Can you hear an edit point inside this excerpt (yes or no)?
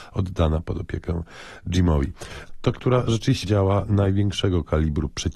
yes